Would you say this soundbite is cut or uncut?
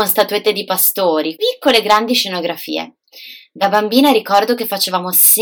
cut